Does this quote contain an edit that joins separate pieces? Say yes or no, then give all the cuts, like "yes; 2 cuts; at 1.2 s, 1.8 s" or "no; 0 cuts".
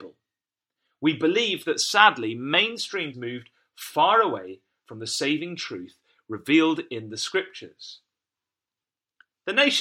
yes; 1 cut; at 3.1 s